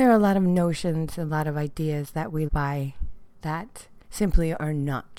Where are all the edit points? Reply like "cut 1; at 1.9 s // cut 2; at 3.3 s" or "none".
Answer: cut 1; at 2.5 s // cut 2; at 4.0 s